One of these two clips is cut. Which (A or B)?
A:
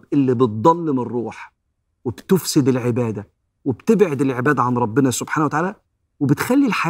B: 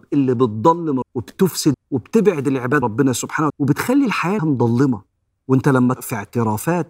B